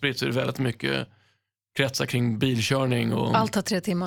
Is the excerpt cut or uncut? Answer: uncut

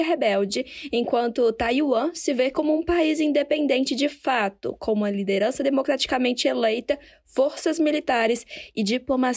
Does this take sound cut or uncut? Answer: uncut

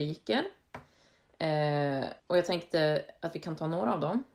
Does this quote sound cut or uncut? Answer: cut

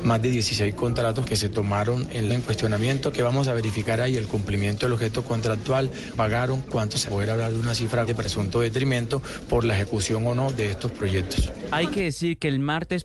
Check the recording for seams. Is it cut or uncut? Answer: cut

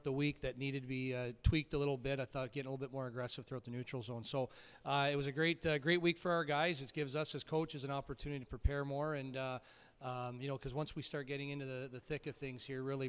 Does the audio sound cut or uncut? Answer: uncut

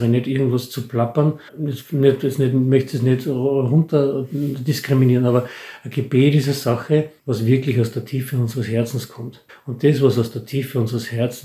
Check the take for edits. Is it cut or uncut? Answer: cut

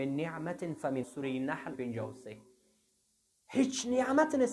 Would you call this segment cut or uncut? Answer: cut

